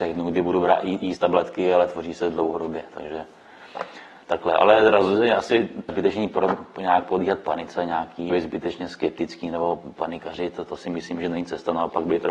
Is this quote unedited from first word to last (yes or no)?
no